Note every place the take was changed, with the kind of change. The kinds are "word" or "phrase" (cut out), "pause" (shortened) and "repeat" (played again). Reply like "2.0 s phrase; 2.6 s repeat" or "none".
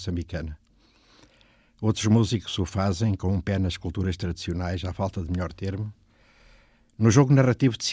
none